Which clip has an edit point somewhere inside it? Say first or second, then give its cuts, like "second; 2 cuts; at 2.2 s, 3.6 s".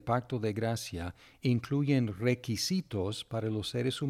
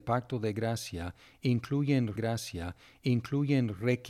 second; 1 cut; at 2.2 s